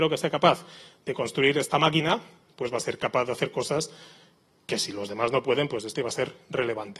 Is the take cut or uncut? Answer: cut